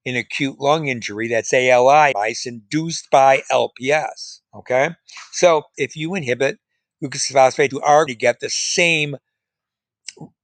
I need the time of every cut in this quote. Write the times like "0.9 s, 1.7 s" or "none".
2.1 s, 4.4 s, 5.7 s, 7.7 s, 8.1 s